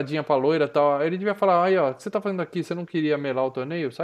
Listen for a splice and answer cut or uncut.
uncut